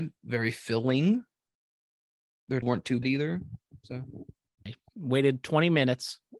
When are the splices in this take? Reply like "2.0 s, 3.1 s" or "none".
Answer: 2.6 s, 3.0 s, 4.7 s